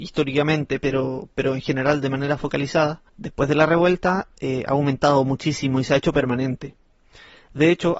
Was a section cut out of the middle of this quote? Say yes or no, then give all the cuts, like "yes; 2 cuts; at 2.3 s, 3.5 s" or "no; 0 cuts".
yes; 1 cut; at 3.1 s